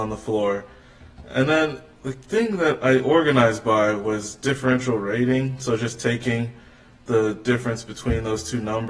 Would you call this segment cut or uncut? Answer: uncut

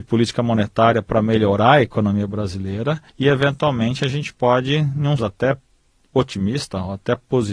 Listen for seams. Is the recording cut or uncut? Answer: cut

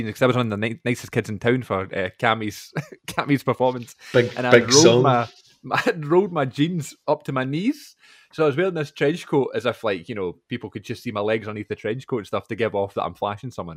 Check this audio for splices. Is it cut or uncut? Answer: uncut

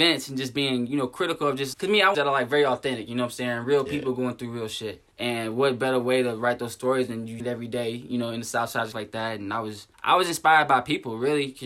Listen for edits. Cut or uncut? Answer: cut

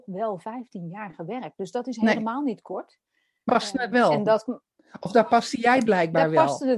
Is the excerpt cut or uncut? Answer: cut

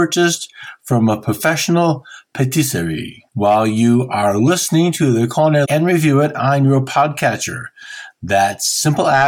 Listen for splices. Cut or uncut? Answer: cut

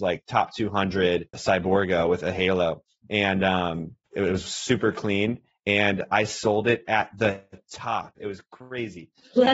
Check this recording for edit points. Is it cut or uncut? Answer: cut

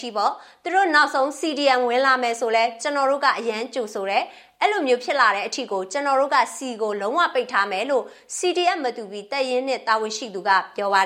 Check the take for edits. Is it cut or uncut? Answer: uncut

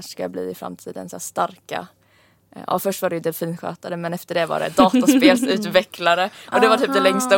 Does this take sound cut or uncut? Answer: uncut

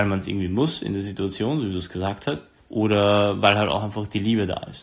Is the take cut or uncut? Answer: cut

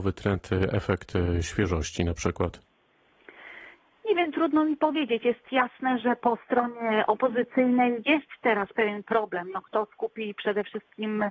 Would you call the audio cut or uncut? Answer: uncut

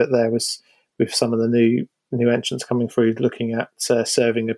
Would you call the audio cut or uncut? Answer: uncut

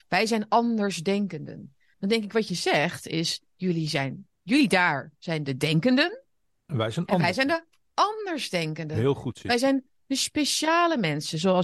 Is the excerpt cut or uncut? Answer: uncut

